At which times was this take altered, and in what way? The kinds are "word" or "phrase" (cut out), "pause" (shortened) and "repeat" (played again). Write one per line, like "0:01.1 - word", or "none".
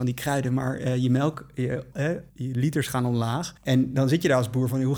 0:01.9 - word
0:02.3 - pause
0:03.6 - pause